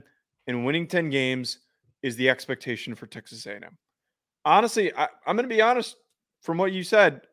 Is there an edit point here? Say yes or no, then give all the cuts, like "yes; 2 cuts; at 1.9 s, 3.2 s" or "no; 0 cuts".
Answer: no; 0 cuts